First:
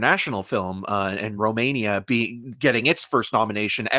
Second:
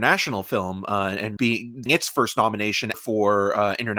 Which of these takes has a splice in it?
second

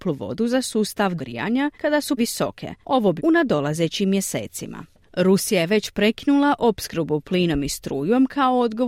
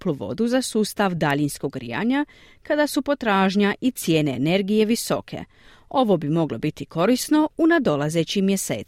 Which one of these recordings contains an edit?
first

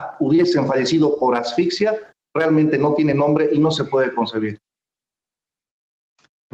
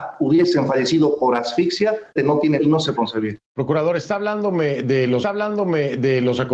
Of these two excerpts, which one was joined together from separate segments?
second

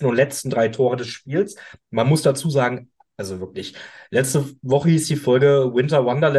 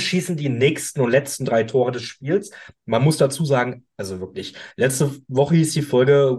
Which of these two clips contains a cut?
second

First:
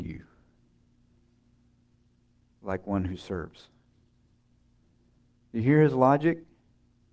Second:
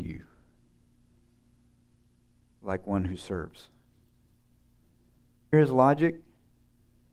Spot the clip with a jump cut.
second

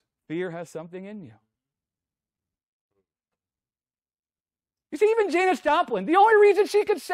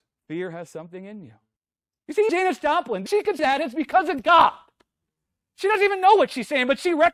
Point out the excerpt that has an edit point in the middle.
second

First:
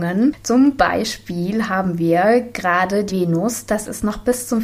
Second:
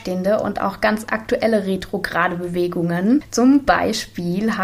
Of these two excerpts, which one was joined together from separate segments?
first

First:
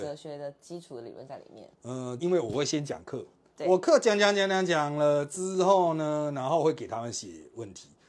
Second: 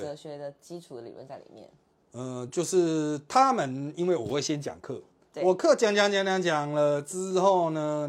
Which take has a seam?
first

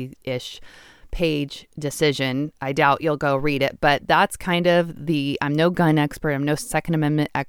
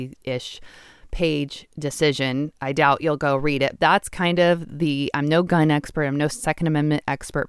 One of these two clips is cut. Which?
second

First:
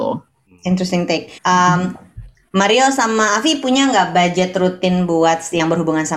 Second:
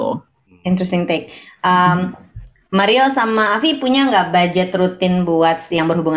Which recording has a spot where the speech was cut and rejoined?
first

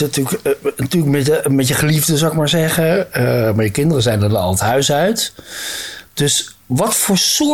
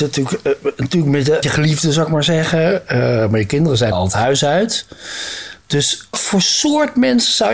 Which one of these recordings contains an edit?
second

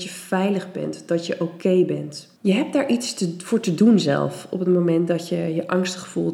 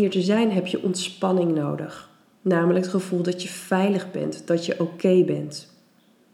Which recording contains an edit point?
first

